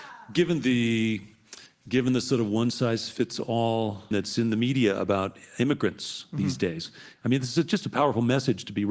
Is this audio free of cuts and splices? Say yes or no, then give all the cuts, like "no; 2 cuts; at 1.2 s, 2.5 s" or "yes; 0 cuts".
no; 2 cuts; at 1.7 s, 4.1 s